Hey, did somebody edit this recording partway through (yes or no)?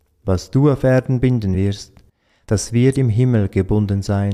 no